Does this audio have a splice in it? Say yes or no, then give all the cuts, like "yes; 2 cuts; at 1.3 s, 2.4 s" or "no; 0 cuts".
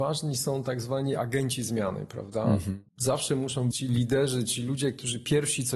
yes; 2 cuts; at 2.9 s, 3.7 s